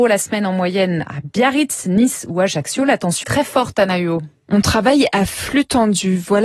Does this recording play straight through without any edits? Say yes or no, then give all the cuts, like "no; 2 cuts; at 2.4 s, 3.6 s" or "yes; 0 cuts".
no; 1 cut; at 3.2 s